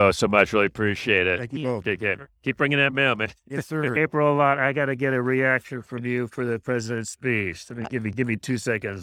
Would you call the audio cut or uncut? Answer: uncut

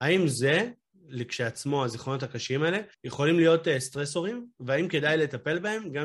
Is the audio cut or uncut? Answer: cut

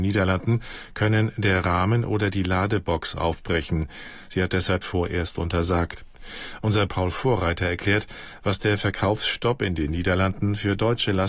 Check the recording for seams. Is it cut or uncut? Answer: cut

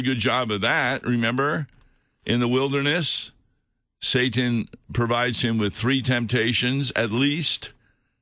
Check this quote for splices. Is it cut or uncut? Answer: uncut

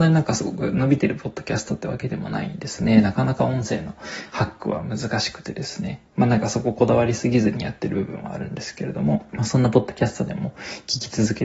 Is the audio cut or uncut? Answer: cut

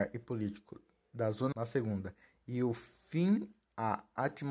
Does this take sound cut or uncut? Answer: cut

